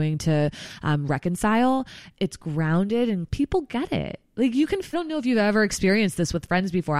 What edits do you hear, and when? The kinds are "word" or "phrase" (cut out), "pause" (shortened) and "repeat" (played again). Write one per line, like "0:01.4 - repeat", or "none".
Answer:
0:02.2 - word
0:03.3 - word
0:04.9 - word